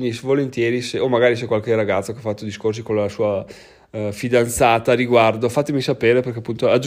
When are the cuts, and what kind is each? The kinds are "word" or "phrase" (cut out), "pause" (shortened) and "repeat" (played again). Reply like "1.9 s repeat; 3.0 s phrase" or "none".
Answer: none